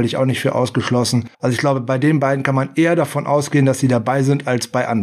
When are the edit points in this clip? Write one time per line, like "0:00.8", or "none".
0:01.3